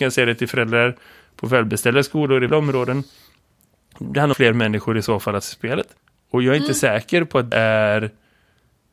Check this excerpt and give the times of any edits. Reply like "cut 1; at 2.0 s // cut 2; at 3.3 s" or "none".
cut 1; at 2.5 s // cut 2; at 4.3 s // cut 3; at 5.4 s // cut 4; at 6.0 s // cut 5; at 7.5 s